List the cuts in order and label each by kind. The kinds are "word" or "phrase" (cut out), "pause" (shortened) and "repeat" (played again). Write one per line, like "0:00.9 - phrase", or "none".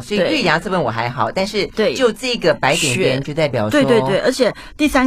none